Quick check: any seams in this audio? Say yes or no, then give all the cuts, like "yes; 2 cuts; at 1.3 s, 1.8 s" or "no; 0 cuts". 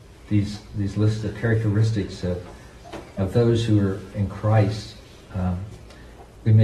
no; 0 cuts